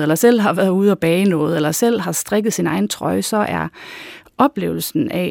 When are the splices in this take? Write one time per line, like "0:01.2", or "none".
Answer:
none